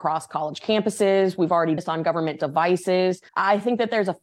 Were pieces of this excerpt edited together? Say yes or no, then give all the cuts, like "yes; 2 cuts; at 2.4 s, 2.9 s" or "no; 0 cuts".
yes; 2 cuts; at 1.8 s, 3.3 s